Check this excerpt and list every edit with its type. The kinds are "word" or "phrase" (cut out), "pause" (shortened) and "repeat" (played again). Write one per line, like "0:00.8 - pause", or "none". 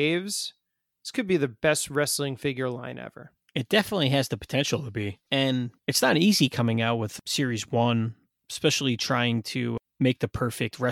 none